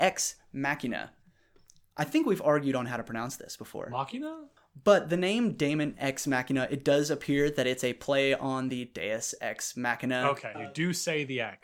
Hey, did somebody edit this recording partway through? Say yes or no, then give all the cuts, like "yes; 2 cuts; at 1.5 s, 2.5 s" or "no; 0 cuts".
yes; 1 cut; at 10.5 s